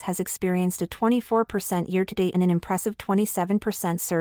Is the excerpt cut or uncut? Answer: cut